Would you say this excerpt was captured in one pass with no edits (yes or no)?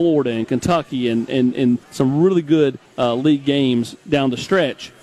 no